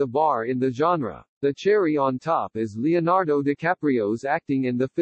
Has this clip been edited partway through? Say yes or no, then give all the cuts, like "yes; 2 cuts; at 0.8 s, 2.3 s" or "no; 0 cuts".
yes; 1 cut; at 1.3 s